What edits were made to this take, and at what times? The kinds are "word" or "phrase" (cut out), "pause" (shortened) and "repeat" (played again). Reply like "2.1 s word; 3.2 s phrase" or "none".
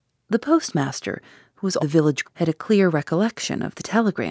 1.8 s word; 2.2 s word